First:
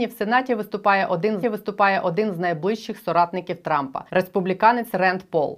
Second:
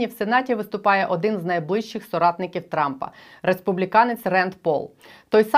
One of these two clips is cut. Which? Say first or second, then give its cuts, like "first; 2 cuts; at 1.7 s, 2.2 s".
first; 2 cuts; at 1.4 s, 4.1 s